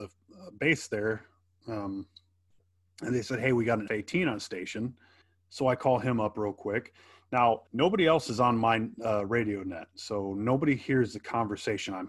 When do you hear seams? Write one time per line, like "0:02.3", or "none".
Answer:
0:03.9
0:05.2
0:07.7